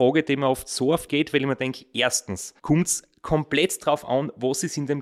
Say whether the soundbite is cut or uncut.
cut